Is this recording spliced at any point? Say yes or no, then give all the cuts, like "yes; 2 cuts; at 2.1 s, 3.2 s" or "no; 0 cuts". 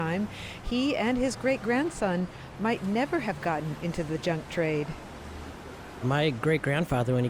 no; 0 cuts